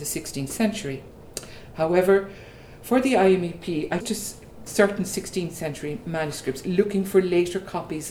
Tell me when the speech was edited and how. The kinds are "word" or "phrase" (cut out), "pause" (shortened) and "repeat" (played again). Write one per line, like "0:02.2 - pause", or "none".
0:04.0 - word
0:04.7 - word

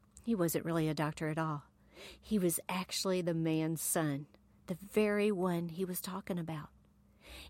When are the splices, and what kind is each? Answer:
none

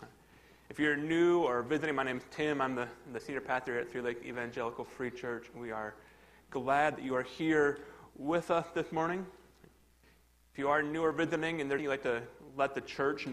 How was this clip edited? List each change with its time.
0:11.8 - word

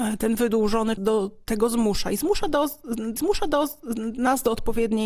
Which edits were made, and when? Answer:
0:01.0 - phrase
0:03.2 - repeat

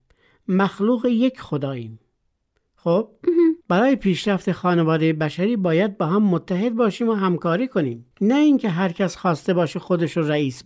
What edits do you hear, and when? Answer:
0:03.6 - pause
0:08.1 - pause

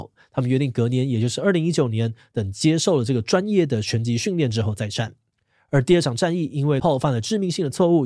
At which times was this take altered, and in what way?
0:06.8 - word

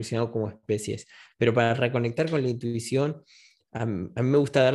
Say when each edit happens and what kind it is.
none

